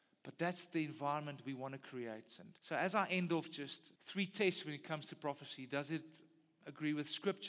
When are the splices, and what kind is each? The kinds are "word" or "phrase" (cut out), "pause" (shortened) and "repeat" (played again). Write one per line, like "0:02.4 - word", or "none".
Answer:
0:02.6 - pause
0:04.0 - pause